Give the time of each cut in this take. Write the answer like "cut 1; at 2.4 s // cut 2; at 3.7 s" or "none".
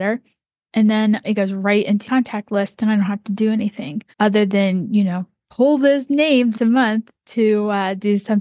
cut 1; at 1.2 s // cut 2; at 2.1 s // cut 3; at 4.1 s // cut 4; at 6.5 s